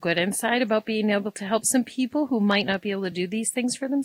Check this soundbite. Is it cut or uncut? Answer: uncut